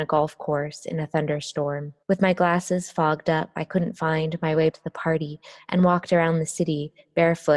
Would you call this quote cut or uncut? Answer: cut